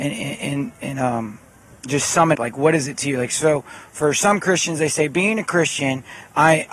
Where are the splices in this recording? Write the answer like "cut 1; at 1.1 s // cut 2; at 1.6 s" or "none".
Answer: cut 1; at 2.3 s